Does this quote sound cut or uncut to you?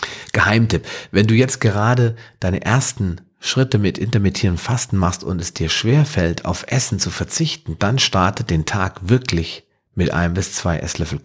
uncut